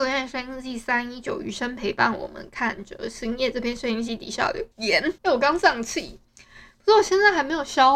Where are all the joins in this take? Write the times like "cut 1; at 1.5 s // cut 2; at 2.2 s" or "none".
cut 1; at 4.7 s // cut 2; at 5.2 s // cut 3; at 6.3 s